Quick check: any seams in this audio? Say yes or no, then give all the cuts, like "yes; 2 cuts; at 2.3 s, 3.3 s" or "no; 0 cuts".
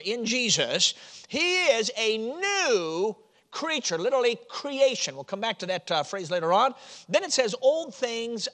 no; 0 cuts